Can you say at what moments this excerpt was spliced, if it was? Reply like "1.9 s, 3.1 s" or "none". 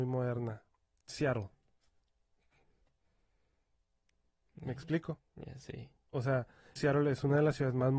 1.1 s, 6.8 s